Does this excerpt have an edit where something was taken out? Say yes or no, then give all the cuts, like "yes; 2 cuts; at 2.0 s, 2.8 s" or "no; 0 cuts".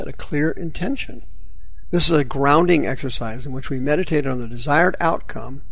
no; 0 cuts